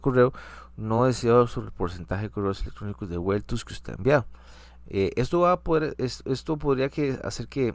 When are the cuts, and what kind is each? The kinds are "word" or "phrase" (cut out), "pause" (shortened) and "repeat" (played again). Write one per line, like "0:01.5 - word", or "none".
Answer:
none